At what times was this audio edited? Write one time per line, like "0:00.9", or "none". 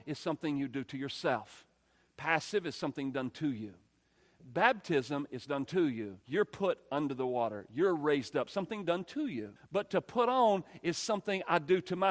0:06.2
0:09.6